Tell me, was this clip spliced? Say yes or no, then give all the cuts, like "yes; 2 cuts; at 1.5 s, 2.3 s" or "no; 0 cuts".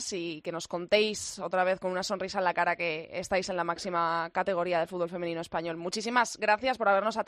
no; 0 cuts